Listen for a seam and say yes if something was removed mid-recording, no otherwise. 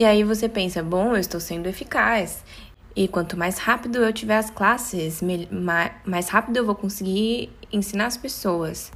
no